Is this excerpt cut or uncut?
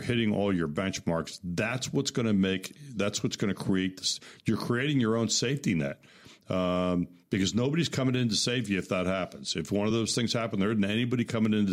uncut